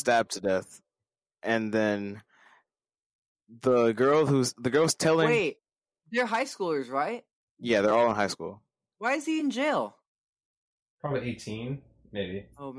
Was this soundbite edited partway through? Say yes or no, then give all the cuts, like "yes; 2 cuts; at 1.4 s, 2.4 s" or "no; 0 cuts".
no; 0 cuts